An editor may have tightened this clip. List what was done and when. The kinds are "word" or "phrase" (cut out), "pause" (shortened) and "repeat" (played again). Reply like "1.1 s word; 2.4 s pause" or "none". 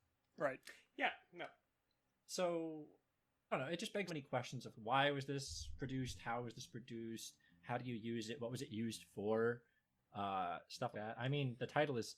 3.5 s word; 4.1 s word; 4.7 s word; 10.9 s word